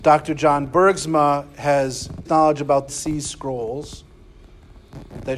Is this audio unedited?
no; 2 cuts; at 2.2 s, 2.9 s

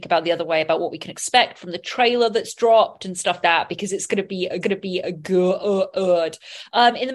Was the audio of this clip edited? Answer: yes; 2 cuts; at 3.4 s, 4.6 s

